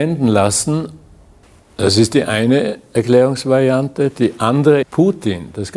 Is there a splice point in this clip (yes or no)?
yes